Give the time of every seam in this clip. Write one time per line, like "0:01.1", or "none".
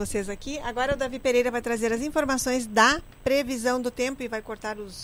none